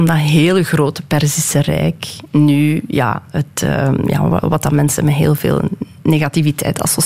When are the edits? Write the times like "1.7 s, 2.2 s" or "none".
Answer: none